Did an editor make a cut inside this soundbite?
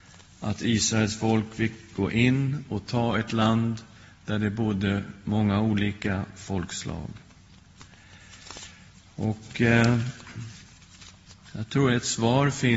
no; 0 cuts

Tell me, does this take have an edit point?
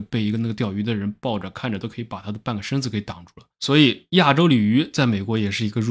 yes; 1 cut; at 3.5 s

